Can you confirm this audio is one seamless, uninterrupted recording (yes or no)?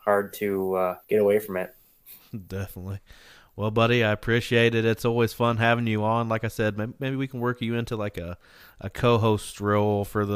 no